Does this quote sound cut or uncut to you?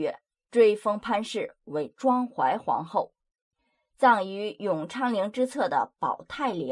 uncut